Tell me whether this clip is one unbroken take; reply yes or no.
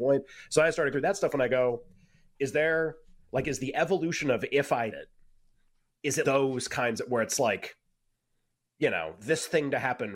no